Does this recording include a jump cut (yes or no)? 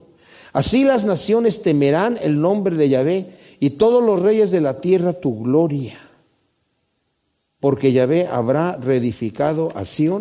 no